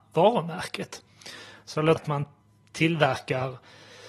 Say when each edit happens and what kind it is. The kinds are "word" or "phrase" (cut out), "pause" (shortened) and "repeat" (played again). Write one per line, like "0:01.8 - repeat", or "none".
0:02.0 - word